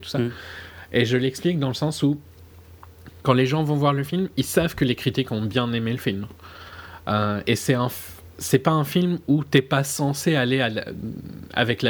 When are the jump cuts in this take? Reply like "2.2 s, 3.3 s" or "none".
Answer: none